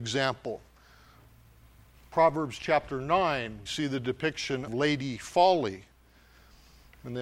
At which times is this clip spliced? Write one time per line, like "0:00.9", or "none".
0:03.7
0:04.7